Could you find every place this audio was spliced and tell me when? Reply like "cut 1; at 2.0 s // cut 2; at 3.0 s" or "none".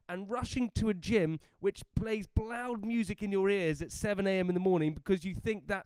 none